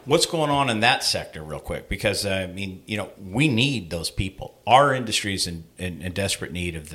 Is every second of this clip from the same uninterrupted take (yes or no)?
yes